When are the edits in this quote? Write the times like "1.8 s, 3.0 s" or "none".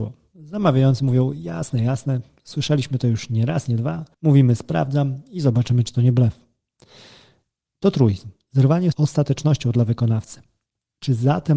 4.1 s, 8.9 s